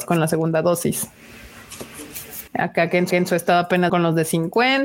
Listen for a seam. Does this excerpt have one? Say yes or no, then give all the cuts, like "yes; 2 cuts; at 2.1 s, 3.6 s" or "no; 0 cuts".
yes; 3 cuts; at 2.5 s, 3.1 s, 3.9 s